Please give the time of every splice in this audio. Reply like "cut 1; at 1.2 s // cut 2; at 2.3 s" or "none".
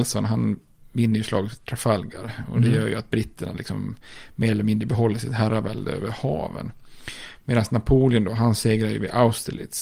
none